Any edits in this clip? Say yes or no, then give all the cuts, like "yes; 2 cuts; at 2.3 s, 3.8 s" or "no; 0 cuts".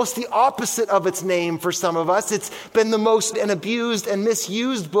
yes; 1 cut; at 3.3 s